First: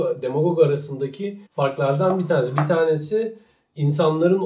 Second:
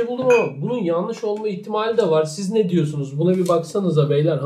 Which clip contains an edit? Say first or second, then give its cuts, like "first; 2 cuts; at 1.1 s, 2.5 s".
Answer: first; 1 cut; at 1.5 s